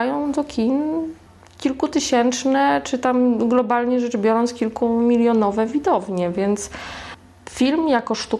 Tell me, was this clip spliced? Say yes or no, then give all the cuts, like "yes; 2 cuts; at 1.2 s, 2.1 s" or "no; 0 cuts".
no; 0 cuts